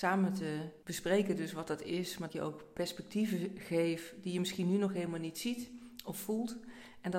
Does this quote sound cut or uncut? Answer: cut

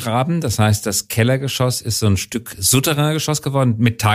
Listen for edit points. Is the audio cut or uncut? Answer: uncut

